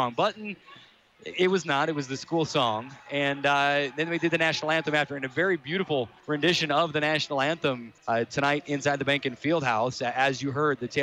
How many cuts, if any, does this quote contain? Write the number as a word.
two